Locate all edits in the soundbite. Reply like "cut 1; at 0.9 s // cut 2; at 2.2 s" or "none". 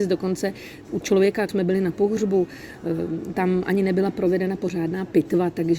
cut 1; at 1.0 s // cut 2; at 1.5 s // cut 3; at 3.3 s